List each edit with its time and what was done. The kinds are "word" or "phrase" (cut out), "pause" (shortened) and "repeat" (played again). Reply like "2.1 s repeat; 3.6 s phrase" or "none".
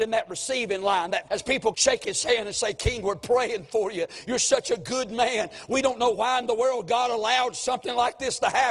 1.3 s phrase; 1.7 s phrase